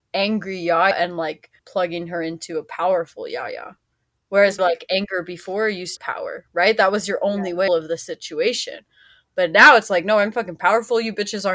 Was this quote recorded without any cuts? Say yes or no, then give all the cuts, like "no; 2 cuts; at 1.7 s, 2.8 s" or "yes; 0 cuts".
no; 5 cuts; at 0.9 s, 1.6 s, 4.6 s, 6.0 s, 7.7 s